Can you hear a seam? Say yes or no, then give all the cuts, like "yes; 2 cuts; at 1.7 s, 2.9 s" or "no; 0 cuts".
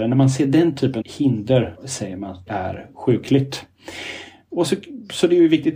yes; 4 cuts; at 1.0 s, 1.8 s, 2.5 s, 4.7 s